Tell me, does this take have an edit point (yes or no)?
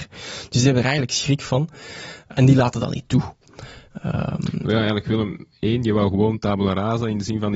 yes